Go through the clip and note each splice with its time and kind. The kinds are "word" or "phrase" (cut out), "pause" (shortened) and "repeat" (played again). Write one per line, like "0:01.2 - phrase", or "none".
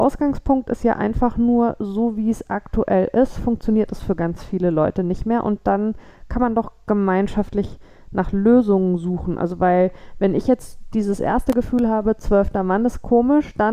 none